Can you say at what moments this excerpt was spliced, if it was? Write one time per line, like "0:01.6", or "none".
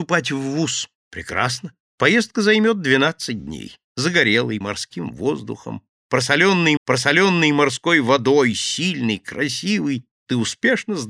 0:01.0
0:04.6
0:06.8